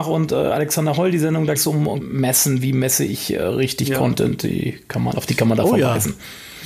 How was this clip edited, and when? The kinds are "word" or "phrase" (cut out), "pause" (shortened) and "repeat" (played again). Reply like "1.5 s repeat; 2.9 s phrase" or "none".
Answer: 1.5 s word; 2.0 s word